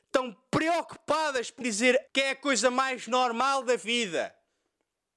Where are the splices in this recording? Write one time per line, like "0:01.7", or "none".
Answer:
0:01.6
0:02.1